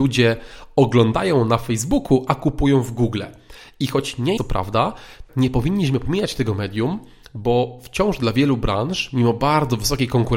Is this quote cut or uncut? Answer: cut